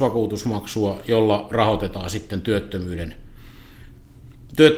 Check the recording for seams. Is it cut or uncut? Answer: uncut